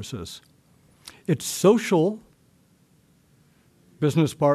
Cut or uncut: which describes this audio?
uncut